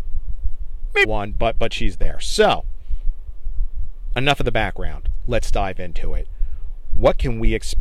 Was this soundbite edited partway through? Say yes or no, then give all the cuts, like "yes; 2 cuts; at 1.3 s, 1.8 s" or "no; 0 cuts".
yes; 1 cut; at 1.0 s